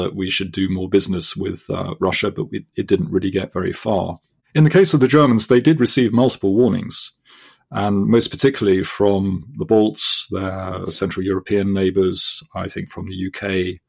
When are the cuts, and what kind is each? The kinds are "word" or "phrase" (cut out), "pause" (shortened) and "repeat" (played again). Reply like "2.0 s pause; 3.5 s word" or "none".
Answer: none